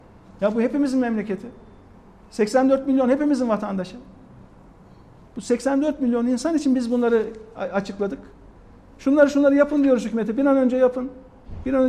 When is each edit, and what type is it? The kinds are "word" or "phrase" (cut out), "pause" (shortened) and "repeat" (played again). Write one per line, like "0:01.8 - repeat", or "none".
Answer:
none

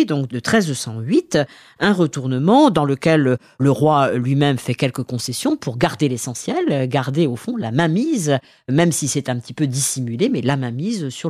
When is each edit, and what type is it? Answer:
none

